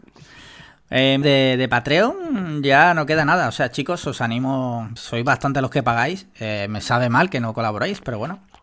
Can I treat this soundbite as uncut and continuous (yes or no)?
no